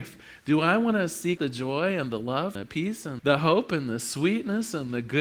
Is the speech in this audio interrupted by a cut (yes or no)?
yes